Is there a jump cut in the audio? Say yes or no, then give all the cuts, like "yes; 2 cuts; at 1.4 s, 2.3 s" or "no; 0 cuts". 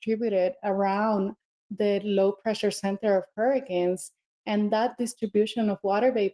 no; 0 cuts